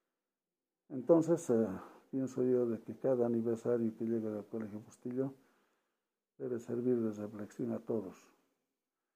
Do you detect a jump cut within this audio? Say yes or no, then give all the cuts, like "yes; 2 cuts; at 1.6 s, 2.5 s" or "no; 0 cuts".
no; 0 cuts